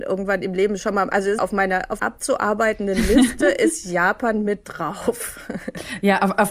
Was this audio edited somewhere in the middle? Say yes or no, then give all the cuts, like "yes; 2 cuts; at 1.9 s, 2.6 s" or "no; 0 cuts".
yes; 2 cuts; at 1.4 s, 2.0 s